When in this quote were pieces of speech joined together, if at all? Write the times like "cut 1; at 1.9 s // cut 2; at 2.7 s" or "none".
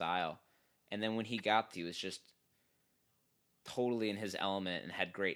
cut 1; at 1.7 s